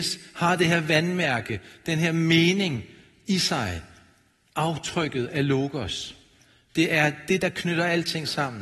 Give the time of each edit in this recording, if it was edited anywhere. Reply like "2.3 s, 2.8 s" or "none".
none